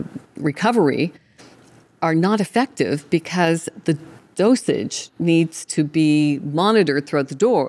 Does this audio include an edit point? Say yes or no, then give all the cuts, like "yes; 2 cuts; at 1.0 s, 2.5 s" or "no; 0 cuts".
no; 0 cuts